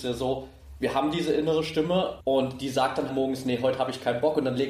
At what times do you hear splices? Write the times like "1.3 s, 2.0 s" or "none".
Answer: 2.2 s, 3.1 s